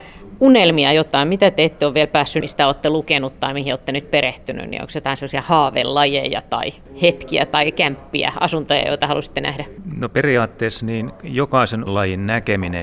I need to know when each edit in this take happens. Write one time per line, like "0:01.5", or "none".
0:02.4
0:11.9